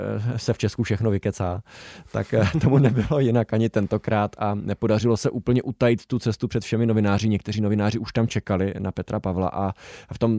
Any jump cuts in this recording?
no; 0 cuts

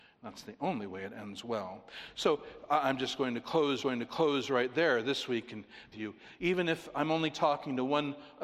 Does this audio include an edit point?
yes; 2 cuts; at 3.8 s, 5.9 s

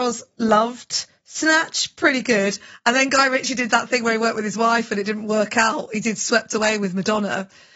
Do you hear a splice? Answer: no; 0 cuts

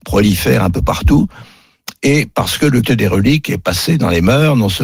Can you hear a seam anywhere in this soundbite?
yes; 1 cut; at 2.8 s

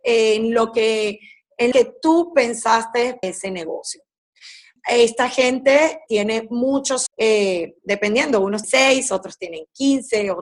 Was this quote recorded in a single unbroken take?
no; 7 cuts; at 1.7 s, 3.2 s, 4.8 s, 6.1 s, 7.1 s, 7.8 s, 8.6 s

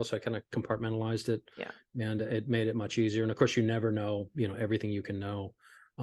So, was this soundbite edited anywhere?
no; 0 cuts

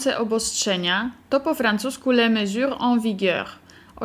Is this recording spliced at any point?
no; 0 cuts

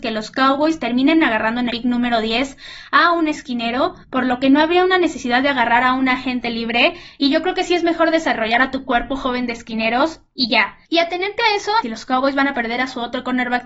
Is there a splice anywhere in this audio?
yes; 4 cuts; at 1.7 s, 4.0 s, 10.8 s, 11.8 s

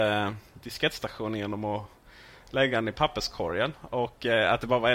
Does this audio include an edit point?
no; 0 cuts

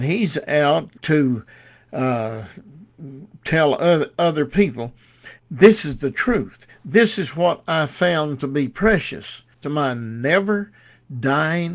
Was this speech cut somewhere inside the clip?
yes; 3 cuts; at 1.0 s, 5.4 s, 9.5 s

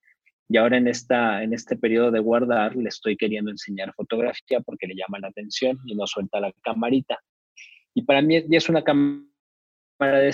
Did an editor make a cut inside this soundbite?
no; 0 cuts

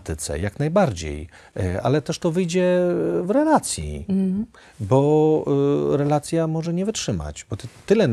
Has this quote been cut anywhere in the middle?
no; 0 cuts

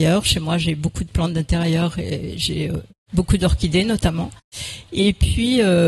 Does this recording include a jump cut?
no; 0 cuts

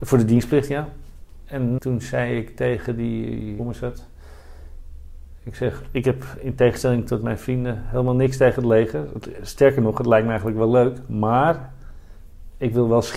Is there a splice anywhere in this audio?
yes; 2 cuts; at 1.8 s, 3.6 s

